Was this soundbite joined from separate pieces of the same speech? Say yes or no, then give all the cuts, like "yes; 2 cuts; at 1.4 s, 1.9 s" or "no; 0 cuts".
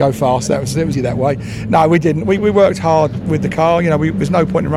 yes; 3 cuts; at 0.9 s, 2.4 s, 3.2 s